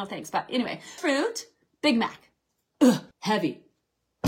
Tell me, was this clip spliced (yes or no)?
yes